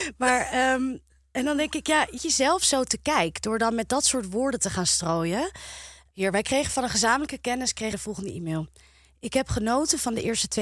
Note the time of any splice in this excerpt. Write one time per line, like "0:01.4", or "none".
0:02.2
0:07.9